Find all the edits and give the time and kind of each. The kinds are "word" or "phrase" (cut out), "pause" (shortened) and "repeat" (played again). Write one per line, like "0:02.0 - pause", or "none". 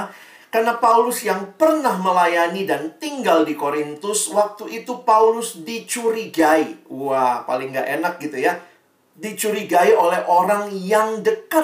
none